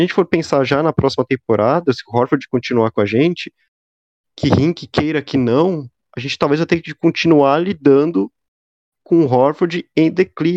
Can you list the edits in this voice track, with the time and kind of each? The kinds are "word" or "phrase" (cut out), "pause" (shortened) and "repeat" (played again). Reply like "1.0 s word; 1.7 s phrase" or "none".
none